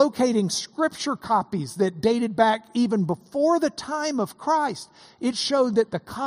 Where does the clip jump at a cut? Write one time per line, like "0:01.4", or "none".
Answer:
none